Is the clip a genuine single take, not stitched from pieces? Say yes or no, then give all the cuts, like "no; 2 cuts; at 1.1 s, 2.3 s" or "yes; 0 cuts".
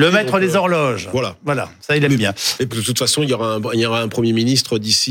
no; 1 cut; at 2.7 s